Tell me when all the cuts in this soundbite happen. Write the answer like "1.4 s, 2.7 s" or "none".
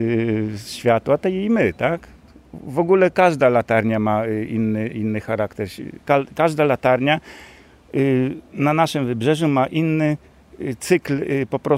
6.0 s